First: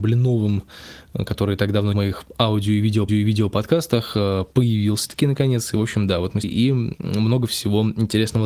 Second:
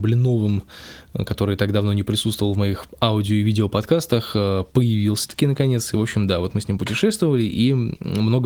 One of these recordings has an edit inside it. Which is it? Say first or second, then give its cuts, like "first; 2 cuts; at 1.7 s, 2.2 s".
first; 3 cuts; at 1.9 s, 3.1 s, 6.4 s